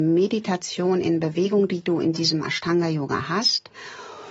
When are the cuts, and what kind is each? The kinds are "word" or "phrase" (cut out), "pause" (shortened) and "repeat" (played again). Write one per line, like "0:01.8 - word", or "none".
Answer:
none